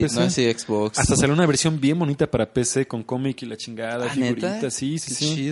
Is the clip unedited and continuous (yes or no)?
yes